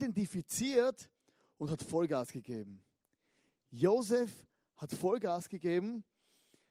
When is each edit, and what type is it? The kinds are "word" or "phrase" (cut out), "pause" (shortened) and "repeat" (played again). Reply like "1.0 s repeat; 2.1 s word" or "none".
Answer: none